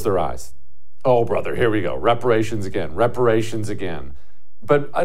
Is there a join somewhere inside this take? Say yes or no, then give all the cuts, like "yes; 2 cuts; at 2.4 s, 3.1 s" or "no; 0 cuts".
no; 0 cuts